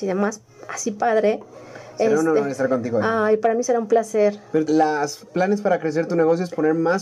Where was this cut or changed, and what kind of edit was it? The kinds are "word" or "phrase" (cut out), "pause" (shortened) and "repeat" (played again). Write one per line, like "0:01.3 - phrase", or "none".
0:04.6 - word

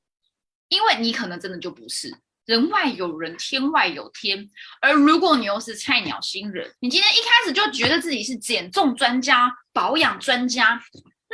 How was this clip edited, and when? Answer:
0:06.8 - pause

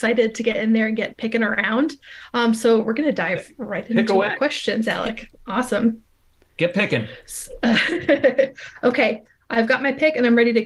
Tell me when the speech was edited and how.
none

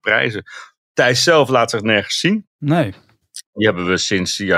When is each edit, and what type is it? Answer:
none

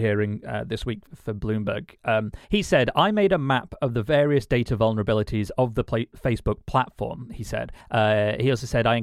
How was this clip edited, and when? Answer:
0:01.1 - word
0:02.4 - pause
0:07.8 - pause

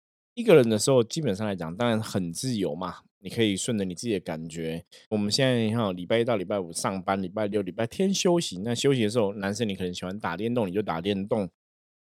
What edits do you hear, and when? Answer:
0:05.1 - word

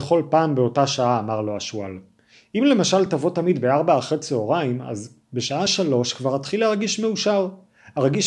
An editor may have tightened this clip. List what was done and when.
none

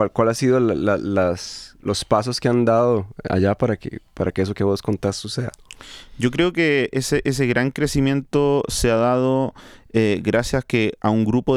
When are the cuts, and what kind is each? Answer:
none

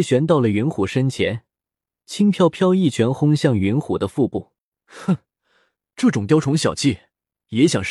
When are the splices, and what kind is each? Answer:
0:04.7 - pause

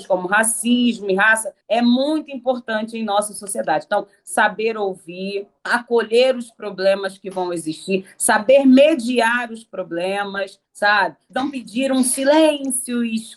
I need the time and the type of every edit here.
0:01.6 - pause
0:10.7 - pause

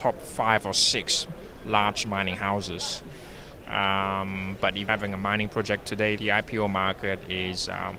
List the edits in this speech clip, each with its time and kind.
0:04.9 - word
0:06.2 - word

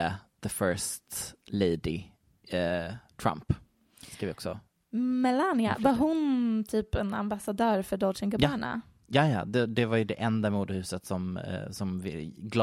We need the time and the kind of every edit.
none

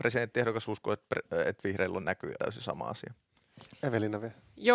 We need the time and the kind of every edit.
0:02.4 - word

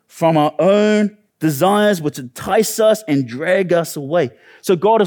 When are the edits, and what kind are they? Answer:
0:01.3 - pause

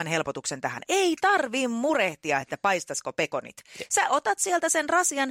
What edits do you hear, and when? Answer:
none

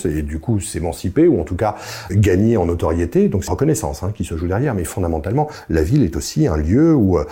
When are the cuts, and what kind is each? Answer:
0:02.1 - word
0:03.5 - word

